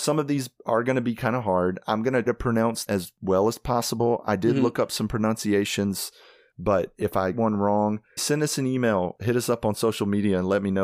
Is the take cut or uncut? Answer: cut